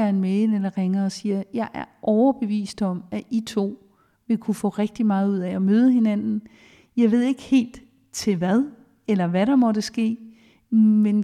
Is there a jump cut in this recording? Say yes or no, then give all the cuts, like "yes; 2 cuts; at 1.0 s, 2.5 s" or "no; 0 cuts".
no; 0 cuts